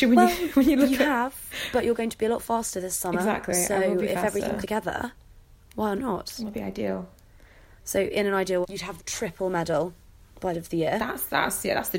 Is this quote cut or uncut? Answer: cut